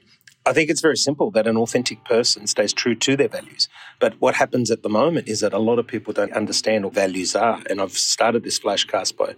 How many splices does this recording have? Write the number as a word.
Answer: two